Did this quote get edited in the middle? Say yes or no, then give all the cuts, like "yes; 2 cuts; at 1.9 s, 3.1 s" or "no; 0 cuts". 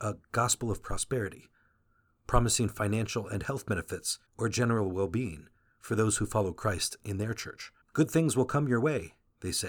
yes; 2 cuts; at 4.3 s, 7.8 s